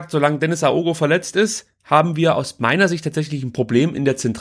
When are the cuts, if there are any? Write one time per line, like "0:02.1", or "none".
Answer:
none